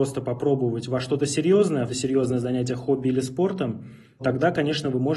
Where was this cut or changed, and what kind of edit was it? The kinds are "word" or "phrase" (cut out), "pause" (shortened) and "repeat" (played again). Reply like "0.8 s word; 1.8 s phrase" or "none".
1.9 s phrase; 4.2 s word